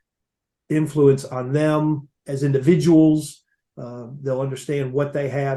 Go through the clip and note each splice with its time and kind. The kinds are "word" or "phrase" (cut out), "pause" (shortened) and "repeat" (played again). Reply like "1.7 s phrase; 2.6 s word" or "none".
none